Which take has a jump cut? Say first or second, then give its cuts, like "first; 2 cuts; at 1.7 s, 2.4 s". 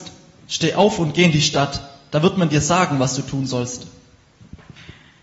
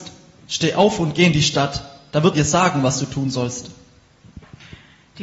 second; 1 cut; at 2.3 s